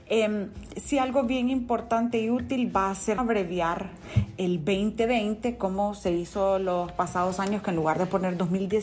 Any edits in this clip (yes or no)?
yes